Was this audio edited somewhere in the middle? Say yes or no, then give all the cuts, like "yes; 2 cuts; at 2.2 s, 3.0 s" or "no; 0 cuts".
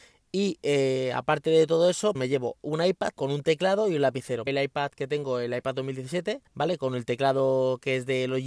yes; 4 cuts; at 2.1 s, 3.1 s, 4.5 s, 6.5 s